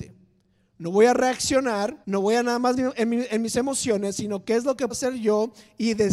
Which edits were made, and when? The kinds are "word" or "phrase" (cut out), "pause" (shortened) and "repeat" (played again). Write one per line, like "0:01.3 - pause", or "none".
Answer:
0:02.0 - pause
0:02.8 - word
0:04.9 - word